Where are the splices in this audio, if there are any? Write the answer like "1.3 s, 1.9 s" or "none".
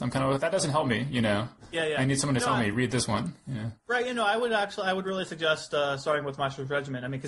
none